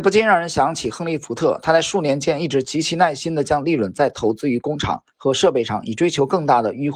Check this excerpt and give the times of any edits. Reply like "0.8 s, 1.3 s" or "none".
5.1 s